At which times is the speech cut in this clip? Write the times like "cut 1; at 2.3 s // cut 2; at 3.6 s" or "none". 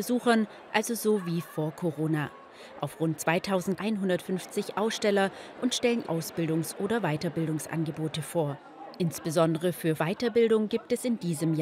cut 1; at 3.8 s // cut 2; at 6.0 s // cut 3; at 10.0 s